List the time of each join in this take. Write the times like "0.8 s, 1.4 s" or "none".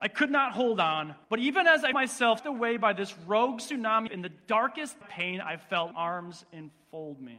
1.2 s, 1.9 s, 2.4 s, 4.1 s, 5.0 s, 5.9 s